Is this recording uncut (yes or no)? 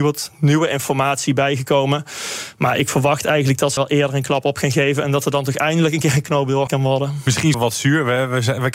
no